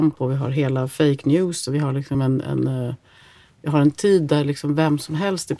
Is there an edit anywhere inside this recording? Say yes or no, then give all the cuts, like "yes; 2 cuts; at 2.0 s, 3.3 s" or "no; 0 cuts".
no; 0 cuts